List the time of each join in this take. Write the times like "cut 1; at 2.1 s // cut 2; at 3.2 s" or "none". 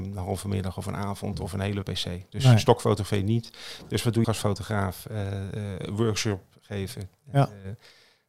cut 1; at 1.8 s // cut 2; at 4.2 s